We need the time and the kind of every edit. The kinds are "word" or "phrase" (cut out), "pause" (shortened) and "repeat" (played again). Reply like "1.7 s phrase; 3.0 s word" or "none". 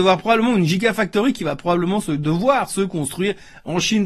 none